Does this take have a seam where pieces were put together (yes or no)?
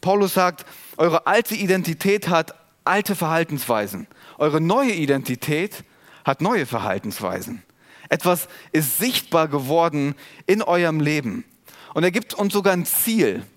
no